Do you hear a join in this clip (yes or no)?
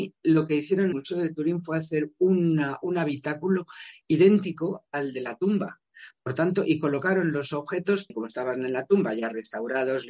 yes